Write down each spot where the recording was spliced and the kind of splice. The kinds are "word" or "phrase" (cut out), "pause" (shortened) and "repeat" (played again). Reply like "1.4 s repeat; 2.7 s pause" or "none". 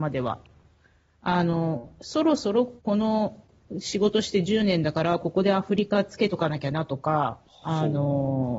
2.8 s pause; 7.5 s pause